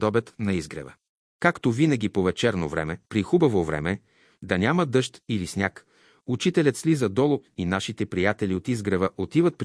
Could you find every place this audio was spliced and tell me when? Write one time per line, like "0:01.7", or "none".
0:03.1